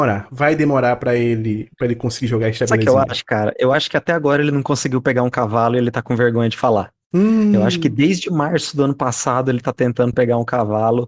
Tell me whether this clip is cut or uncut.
uncut